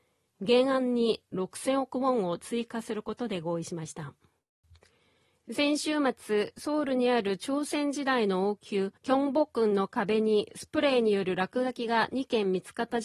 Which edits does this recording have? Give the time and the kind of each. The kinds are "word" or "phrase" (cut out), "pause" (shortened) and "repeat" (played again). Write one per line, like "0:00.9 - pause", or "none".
0:04.6 - pause
0:09.0 - pause